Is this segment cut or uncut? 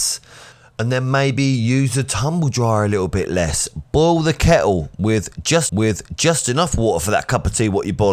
cut